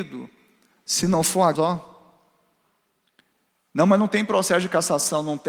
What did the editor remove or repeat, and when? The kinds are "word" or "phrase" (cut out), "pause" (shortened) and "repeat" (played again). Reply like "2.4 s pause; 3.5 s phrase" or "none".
1.6 s phrase